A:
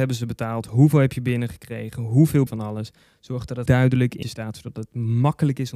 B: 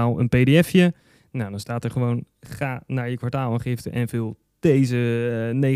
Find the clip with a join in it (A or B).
A